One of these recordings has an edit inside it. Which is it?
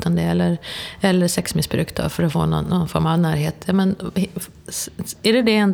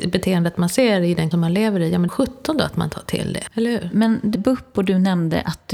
second; 3 cuts; at 1.3 s, 2.1 s, 4.3 s

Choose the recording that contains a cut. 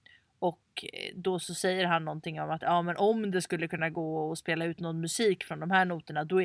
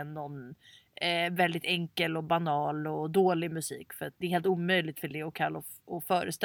second; 1 cut; at 4.2 s

